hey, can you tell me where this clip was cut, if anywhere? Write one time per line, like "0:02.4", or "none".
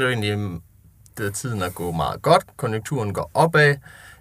0:01.2